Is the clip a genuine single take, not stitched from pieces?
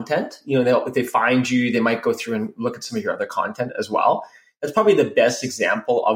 yes; 0 cuts

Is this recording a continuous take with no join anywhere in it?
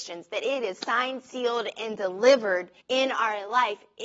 no; 1 cut; at 2.8 s

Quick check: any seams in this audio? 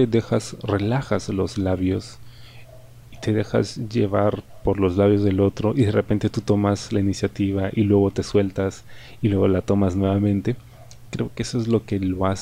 no; 0 cuts

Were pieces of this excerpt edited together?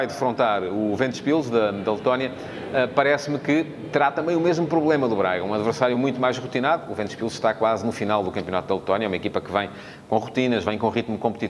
no; 0 cuts

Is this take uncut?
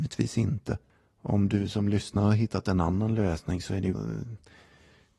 no; 1 cut; at 3.9 s

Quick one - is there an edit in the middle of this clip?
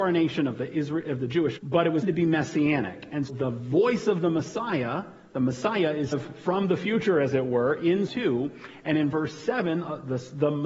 yes; 5 cuts; at 1.6 s, 2.0 s, 3.3 s, 6.1 s, 8.1 s

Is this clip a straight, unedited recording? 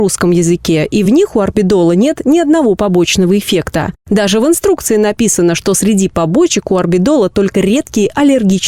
yes; 0 cuts

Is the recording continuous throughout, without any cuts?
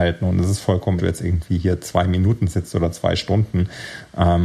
no; 1 cut; at 1.0 s

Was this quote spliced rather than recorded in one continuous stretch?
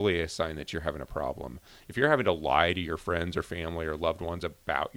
no; 0 cuts

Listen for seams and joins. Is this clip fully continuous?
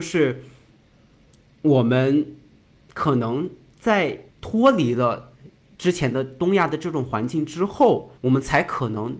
no; 2 cuts; at 4.3 s, 8.2 s

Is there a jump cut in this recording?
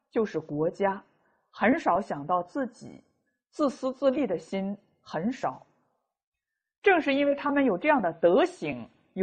no; 0 cuts

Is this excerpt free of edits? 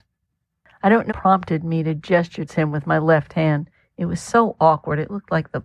no; 2 cuts; at 1.1 s, 2.5 s

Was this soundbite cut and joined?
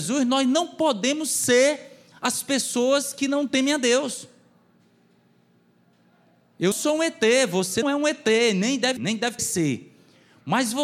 yes; 5 cuts; at 2.1 s, 6.7 s, 7.8 s, 9.0 s, 9.4 s

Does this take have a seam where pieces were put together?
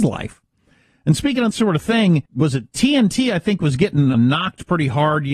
yes; 3 cuts; at 1.5 s, 2.3 s, 4.1 s

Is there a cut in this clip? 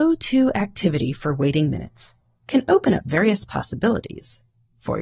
no; 0 cuts

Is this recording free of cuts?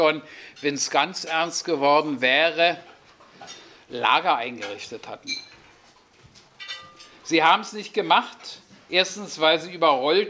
yes; 0 cuts

